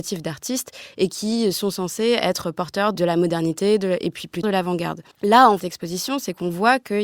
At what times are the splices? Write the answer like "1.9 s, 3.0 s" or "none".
4.4 s, 5.1 s, 5.6 s